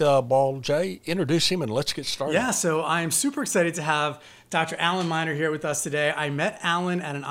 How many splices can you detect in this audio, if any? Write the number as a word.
zero